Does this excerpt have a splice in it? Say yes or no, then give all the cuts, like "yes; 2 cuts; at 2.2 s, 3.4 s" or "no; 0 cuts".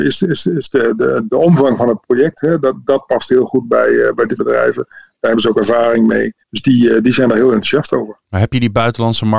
yes; 2 cuts; at 4.4 s, 6.4 s